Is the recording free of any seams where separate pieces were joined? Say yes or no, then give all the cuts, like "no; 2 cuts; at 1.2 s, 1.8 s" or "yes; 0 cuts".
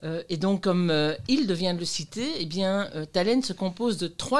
yes; 0 cuts